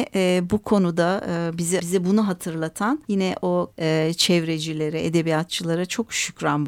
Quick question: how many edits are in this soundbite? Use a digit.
3